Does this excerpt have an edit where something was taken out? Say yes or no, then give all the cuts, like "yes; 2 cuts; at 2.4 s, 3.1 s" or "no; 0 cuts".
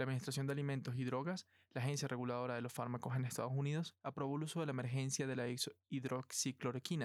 no; 0 cuts